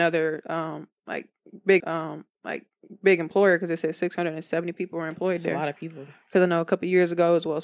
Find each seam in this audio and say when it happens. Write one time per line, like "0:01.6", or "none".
0:01.8